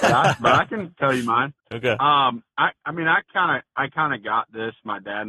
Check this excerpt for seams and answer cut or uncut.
cut